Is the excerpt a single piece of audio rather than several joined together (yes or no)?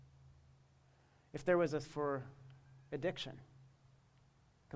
no